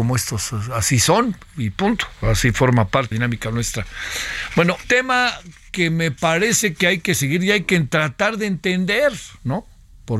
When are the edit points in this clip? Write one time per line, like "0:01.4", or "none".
0:03.1
0:04.8